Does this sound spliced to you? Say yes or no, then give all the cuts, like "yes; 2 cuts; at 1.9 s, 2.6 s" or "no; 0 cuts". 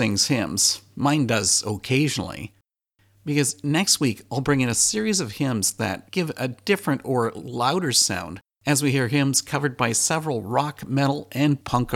no; 0 cuts